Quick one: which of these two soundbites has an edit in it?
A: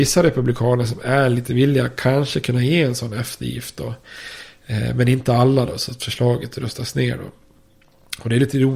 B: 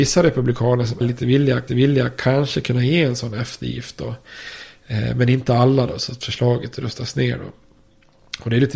B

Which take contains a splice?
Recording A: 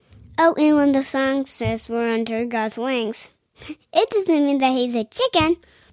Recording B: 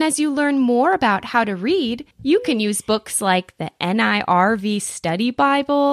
B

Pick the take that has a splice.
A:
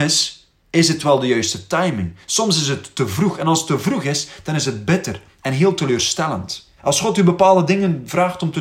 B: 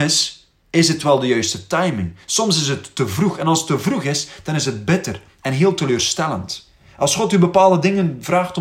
A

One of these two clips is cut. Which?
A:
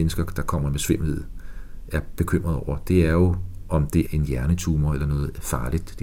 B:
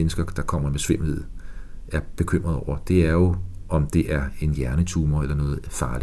A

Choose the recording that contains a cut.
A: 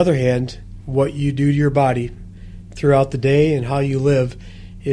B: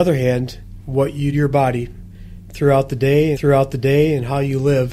B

